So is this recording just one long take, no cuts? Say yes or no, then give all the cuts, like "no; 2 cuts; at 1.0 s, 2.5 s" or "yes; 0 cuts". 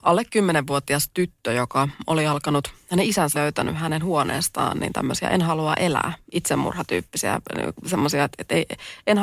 no; 2 cuts; at 3.3 s, 8.3 s